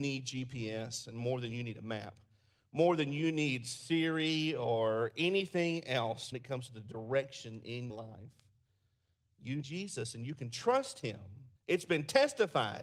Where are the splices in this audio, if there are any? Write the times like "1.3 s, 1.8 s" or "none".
6.3 s, 7.9 s, 9.6 s, 11.6 s